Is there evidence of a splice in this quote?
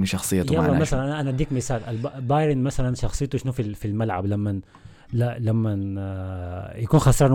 no; 0 cuts

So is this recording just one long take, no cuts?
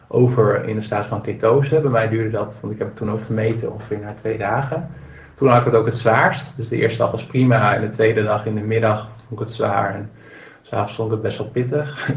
yes; 0 cuts

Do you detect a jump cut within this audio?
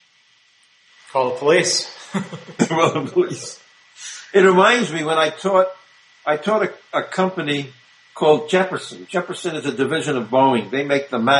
no; 0 cuts

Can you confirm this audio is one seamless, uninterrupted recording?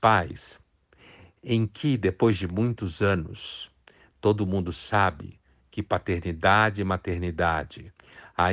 yes; 0 cuts

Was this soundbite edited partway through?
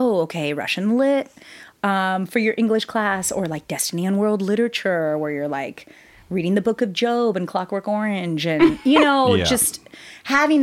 no; 0 cuts

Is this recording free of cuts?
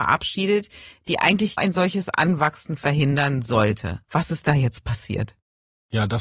no; 2 cuts; at 1.6 s, 4.0 s

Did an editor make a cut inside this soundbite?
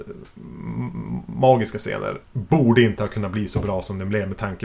yes; 1 cut; at 2.2 s

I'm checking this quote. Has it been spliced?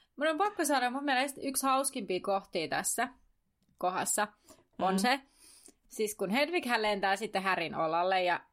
no; 0 cuts

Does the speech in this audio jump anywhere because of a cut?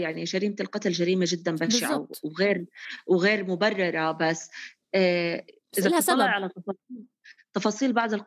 no; 0 cuts

